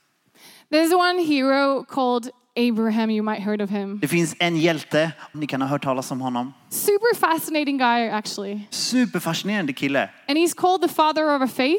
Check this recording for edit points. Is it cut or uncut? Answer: cut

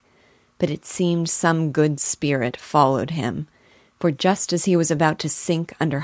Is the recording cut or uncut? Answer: uncut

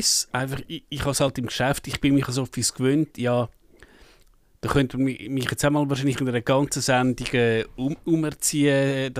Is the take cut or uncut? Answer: uncut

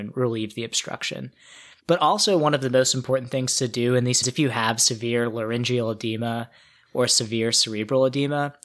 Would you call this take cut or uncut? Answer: cut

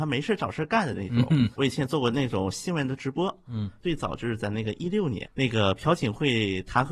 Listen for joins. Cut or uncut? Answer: cut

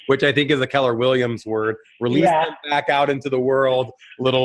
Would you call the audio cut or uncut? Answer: uncut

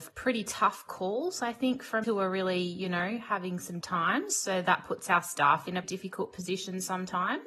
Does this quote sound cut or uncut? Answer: cut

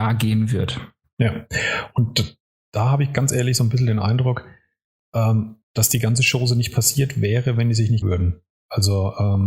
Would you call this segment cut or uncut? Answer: cut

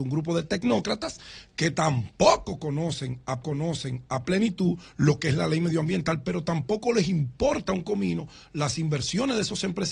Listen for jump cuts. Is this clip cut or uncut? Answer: cut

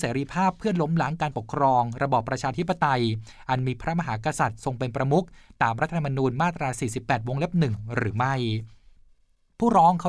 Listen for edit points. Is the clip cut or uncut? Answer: uncut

